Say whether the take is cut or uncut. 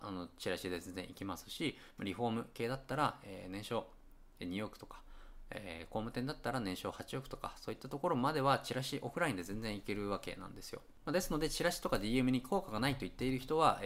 uncut